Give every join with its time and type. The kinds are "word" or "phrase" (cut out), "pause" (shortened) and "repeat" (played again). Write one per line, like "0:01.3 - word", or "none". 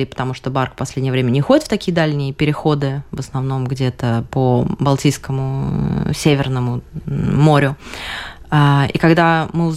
none